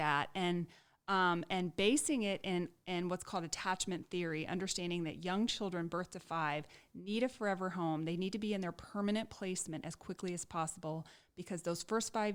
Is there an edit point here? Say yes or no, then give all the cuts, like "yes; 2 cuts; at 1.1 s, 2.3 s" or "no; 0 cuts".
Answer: no; 0 cuts